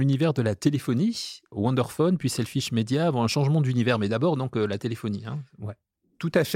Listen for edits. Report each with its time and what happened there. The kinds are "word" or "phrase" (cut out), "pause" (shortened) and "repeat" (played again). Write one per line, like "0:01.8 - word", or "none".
0:01.5 - word